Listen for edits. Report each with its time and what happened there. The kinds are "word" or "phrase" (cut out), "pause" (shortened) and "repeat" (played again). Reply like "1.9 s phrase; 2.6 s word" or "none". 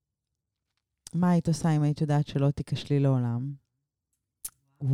none